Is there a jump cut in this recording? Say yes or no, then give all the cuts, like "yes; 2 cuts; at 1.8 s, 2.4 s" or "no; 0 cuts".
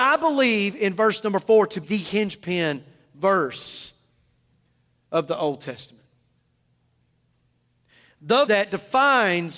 yes; 2 cuts; at 1.8 s, 8.5 s